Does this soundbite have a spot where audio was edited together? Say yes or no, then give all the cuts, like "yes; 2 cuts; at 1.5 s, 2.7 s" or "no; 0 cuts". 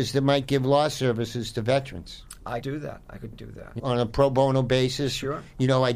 yes; 3 cuts; at 2.6 s, 3.3 s, 3.8 s